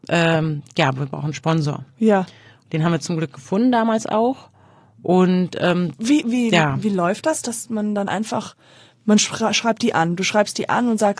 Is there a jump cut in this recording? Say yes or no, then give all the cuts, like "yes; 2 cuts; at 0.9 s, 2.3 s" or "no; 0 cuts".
no; 0 cuts